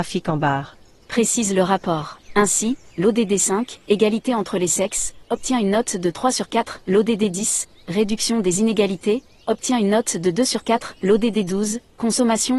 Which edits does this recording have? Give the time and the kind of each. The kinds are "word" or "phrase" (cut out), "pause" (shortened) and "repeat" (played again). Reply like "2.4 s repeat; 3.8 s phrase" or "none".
2.2 s pause